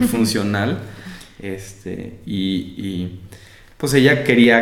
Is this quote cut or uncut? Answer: uncut